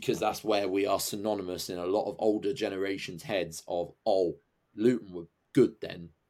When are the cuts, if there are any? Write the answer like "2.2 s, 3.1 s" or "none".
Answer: none

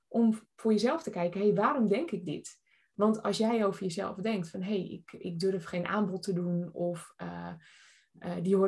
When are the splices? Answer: none

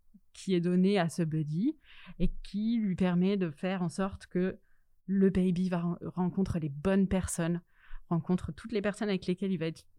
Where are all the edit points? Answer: none

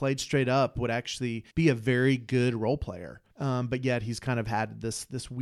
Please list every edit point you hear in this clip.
1.5 s, 3.3 s

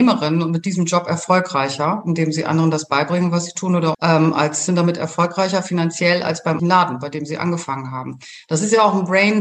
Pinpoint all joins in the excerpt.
3.9 s, 4.7 s, 6.6 s

